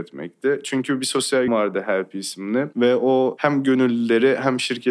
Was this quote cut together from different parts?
yes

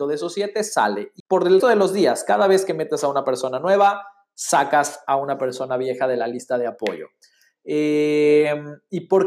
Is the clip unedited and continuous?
no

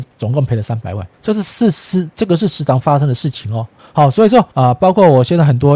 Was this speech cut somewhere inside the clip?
yes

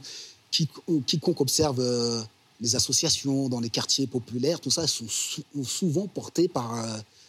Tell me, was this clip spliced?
no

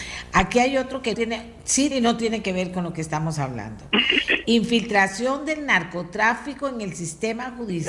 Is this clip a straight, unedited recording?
no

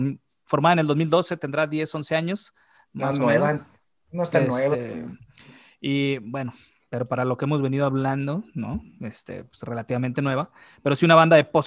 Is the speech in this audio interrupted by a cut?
no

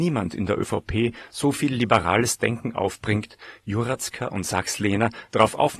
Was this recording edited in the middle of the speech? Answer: no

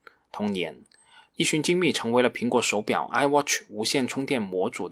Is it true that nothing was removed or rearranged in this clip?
yes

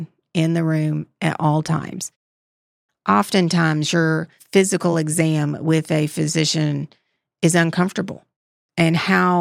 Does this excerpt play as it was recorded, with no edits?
yes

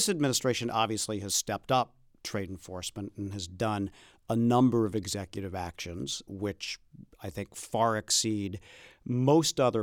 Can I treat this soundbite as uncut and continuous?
yes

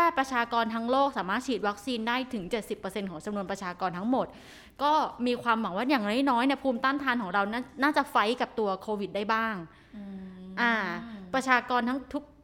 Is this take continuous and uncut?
yes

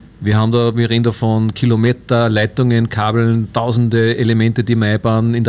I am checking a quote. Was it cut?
no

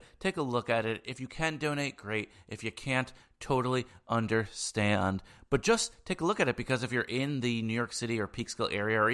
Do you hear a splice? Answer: no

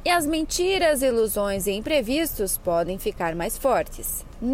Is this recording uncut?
yes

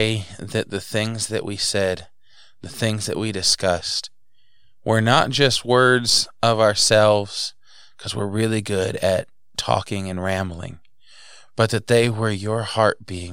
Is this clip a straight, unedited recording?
yes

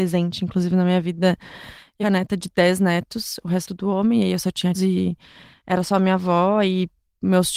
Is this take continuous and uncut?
no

